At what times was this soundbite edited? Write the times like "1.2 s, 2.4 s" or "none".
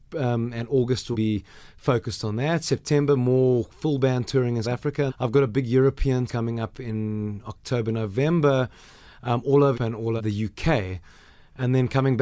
1.1 s, 4.6 s, 5.1 s, 6.3 s, 9.7 s, 10.2 s